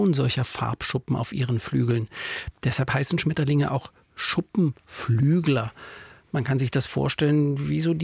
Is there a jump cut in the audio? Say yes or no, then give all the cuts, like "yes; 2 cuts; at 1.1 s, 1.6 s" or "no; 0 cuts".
no; 0 cuts